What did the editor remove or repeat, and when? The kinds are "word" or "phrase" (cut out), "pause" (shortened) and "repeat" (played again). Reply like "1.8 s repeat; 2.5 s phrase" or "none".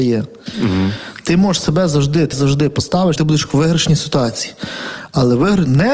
2.3 s word; 3.2 s phrase